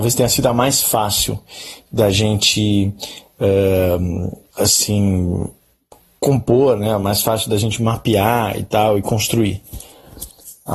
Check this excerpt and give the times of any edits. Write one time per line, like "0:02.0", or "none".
0:04.5